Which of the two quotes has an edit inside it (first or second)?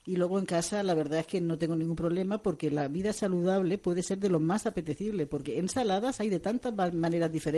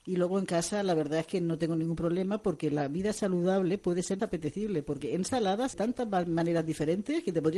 second